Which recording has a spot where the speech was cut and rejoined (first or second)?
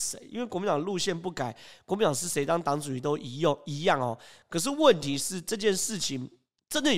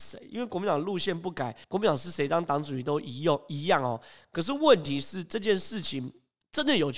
second